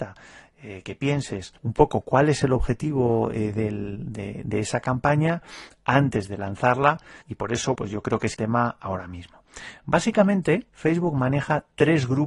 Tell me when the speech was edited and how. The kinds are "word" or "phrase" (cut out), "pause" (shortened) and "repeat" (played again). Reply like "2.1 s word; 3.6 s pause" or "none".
1.6 s pause; 7.2 s pause; 7.7 s word; 8.3 s phrase; 10.7 s pause